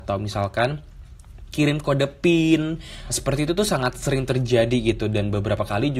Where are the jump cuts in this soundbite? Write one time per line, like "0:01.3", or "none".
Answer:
0:03.1